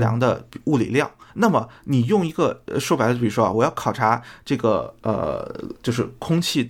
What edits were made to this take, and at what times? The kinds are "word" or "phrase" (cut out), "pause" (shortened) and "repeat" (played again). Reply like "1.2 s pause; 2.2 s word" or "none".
1.3 s pause